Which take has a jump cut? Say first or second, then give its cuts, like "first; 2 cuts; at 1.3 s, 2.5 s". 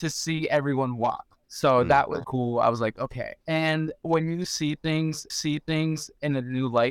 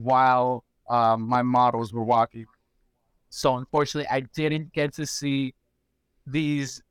first; 4 cuts; at 1.4 s, 2.2 s, 3.4 s, 5.3 s